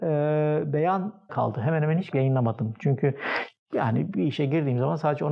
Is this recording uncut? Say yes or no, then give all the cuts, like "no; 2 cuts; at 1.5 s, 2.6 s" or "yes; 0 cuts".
no; 2 cuts; at 1.3 s, 2.1 s